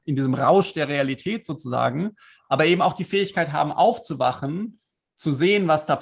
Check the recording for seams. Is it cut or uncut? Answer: uncut